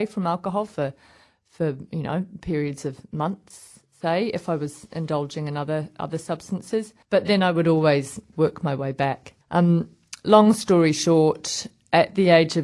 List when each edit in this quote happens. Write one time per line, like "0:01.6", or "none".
0:07.0
0:09.4